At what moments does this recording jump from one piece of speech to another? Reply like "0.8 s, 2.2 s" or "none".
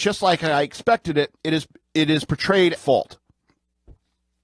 1.4 s, 1.8 s, 2.8 s